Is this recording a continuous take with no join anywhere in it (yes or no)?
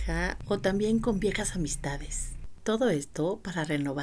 yes